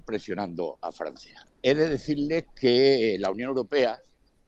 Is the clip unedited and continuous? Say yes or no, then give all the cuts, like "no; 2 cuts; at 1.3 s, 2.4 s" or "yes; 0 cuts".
no; 1 cut; at 1.5 s